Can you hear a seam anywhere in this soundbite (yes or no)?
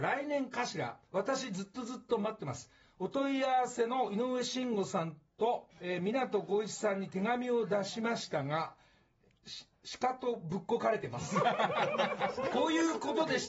yes